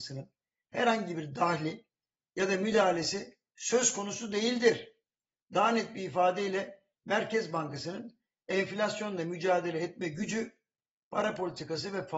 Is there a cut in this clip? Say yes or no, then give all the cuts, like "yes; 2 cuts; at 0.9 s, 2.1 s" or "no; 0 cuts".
no; 0 cuts